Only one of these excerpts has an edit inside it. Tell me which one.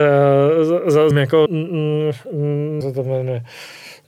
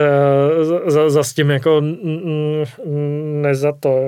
first; 3 cuts; at 1.1 s, 1.5 s, 2.8 s

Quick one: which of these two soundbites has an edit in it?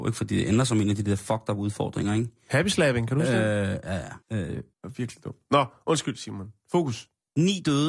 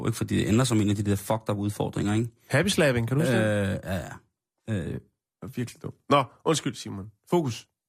first; 2 cuts; at 4.2 s, 4.7 s

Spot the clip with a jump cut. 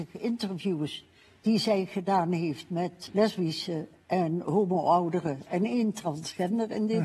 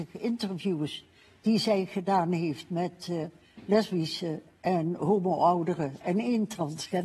first; 1 cut; at 3.1 s

